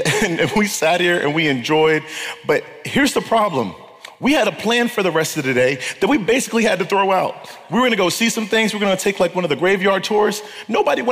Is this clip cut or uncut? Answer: uncut